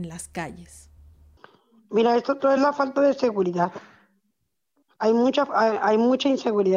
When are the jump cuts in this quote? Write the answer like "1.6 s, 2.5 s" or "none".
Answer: none